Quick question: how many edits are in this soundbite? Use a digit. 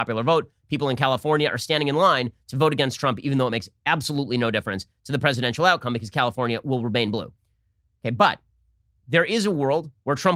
0